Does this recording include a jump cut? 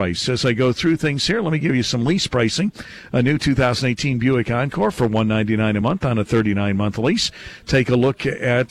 no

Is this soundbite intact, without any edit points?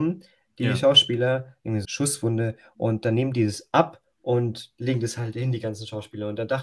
no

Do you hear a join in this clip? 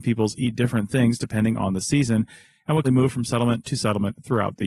yes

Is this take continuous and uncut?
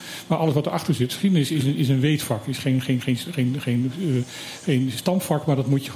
yes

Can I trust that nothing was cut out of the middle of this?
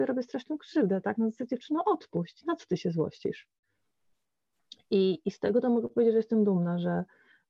yes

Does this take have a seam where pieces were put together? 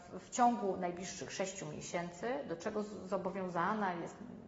no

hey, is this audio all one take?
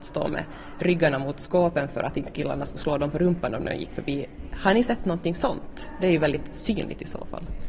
yes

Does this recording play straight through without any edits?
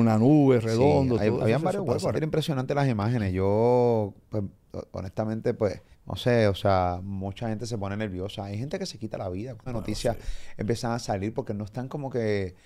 no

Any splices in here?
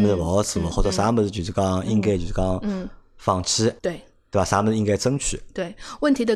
yes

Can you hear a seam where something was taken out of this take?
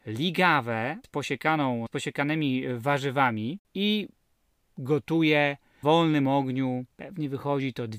yes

